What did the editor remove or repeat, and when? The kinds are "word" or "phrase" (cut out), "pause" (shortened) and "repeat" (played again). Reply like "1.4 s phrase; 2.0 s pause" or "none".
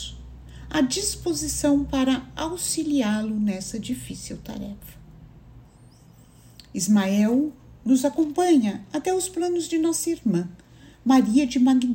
none